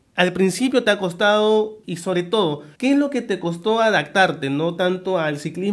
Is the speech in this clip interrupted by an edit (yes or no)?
yes